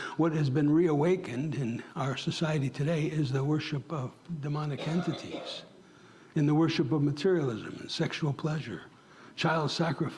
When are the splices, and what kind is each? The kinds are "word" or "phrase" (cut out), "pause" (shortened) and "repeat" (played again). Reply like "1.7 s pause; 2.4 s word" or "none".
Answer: none